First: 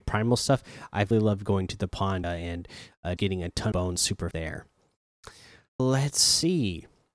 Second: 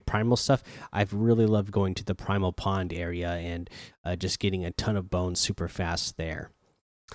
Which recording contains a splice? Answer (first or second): first